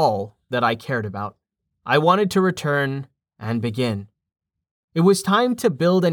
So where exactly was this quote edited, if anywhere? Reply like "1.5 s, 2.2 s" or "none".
1.7 s